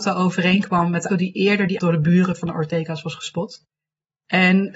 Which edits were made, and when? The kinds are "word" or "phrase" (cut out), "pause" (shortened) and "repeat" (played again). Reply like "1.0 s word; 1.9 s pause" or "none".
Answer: 1.1 s word; 1.8 s word